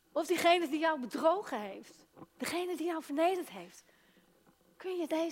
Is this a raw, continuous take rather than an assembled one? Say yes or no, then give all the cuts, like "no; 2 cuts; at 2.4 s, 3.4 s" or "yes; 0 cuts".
yes; 0 cuts